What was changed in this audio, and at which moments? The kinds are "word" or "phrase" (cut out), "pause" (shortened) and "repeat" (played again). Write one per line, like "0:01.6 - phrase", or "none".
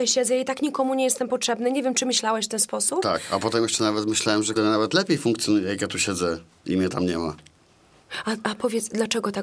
0:04.6 - word